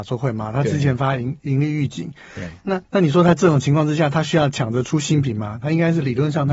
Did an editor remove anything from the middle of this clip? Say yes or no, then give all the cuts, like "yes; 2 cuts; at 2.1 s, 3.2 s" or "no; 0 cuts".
yes; 1 cut; at 2.8 s